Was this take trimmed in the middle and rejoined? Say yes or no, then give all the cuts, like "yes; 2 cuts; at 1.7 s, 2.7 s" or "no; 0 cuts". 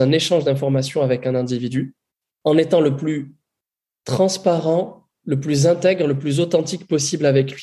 no; 0 cuts